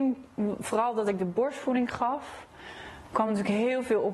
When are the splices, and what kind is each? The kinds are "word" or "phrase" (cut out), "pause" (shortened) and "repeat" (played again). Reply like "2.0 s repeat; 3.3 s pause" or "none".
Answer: none